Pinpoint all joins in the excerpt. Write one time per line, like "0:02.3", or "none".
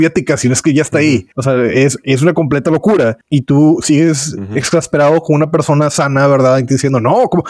0:01.3
0:03.2